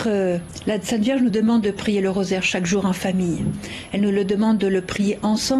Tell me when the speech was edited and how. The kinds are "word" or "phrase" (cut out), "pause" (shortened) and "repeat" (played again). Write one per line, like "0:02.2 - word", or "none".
none